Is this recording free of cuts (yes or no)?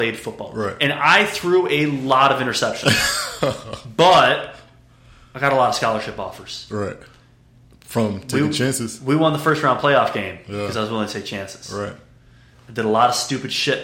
yes